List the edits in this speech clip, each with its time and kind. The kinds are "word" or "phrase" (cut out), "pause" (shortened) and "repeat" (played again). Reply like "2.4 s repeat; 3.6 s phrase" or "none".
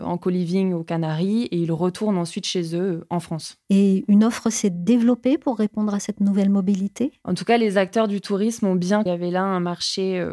9.1 s phrase